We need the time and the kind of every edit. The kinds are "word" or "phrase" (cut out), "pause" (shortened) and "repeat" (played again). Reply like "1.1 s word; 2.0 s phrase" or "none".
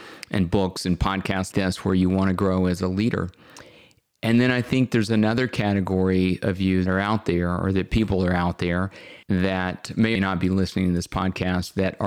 1.5 s word; 6.9 s word; 9.2 s pause; 10.2 s word

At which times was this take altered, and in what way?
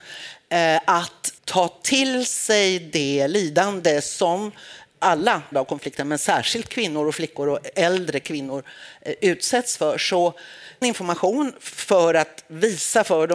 1.4 s pause; 5.5 s word; 10.8 s phrase

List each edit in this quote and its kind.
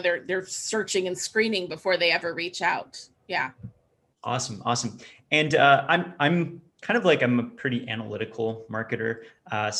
none

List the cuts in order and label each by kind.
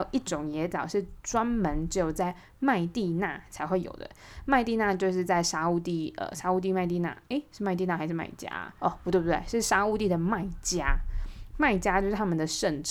8.7 s pause

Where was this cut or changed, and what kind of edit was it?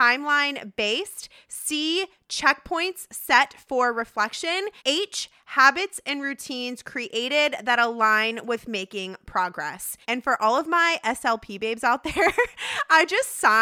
4.8 s pause; 10.0 s pause

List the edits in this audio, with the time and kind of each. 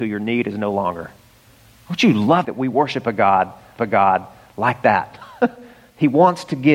2.4 s phrase; 3.8 s repeat

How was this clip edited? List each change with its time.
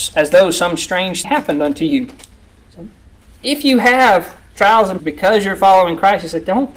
1.2 s word; 5.0 s word

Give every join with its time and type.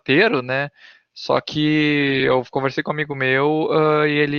none

